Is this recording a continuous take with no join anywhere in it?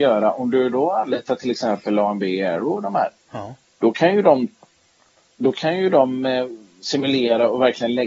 yes; 0 cuts

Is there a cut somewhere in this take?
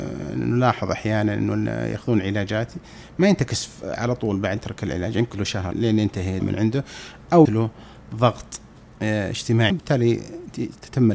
yes; 6 cuts; at 4.6 s, 5.3 s, 5.7 s, 6.4 s, 7.4 s, 9.7 s

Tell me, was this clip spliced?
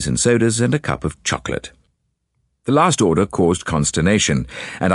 no; 0 cuts

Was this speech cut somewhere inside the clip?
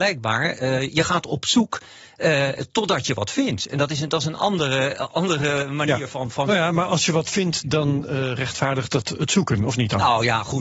no; 0 cuts

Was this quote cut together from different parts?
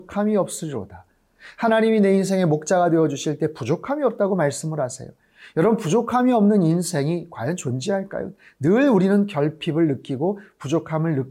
no; 0 cuts

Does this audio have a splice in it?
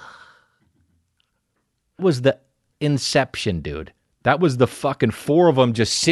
yes; 2 cuts; at 2.0 s, 2.7 s

